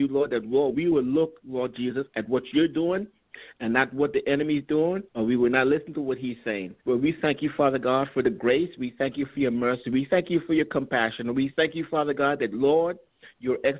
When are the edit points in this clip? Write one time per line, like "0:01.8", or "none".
0:05.1
0:06.8